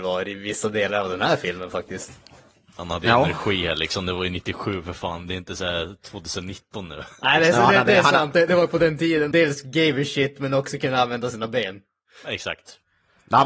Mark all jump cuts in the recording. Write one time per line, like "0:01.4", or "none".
0:07.1
0:09.3